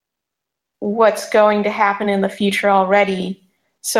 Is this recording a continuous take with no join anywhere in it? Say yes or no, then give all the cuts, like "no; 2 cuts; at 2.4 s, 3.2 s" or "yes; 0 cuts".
yes; 0 cuts